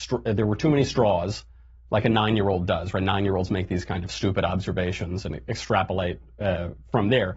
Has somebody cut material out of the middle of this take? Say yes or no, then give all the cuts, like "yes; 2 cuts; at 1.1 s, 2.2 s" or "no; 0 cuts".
no; 0 cuts